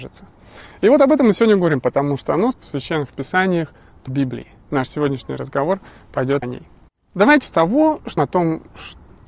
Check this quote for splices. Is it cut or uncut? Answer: cut